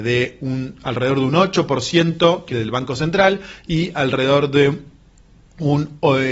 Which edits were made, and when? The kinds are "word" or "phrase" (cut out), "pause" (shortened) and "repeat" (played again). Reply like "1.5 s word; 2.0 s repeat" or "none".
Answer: 2.5 s phrase

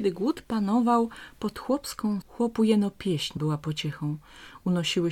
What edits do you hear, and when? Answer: 2.2 s word; 3.4 s word

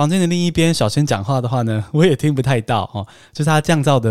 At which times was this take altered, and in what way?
none

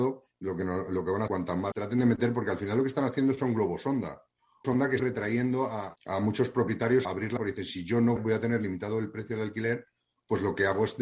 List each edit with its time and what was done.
1.3 s word; 1.7 s word; 4.6 s word; 5.0 s word; 6.0 s word; 7.0 s word; 7.4 s word; 8.2 s word

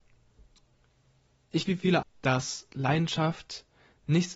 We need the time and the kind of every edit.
1.7 s word; 2.0 s word

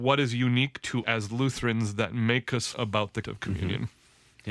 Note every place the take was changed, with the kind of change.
1.0 s word; 2.7 s word; 3.2 s word

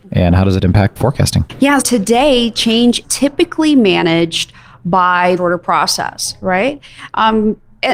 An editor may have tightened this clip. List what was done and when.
1.0 s word; 1.8 s word; 3.0 s word; 5.4 s phrase

